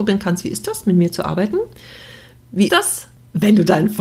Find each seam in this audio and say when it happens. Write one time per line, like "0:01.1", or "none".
0:02.7